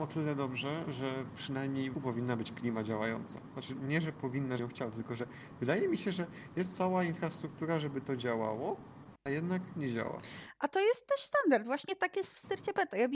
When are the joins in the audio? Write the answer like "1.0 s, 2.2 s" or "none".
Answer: 1.9 s, 4.6 s